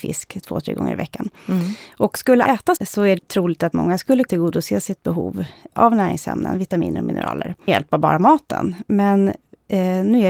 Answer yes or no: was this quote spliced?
yes